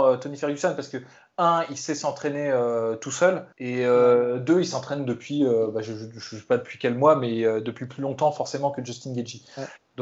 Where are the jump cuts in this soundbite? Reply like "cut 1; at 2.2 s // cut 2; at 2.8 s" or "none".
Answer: cut 1; at 3.5 s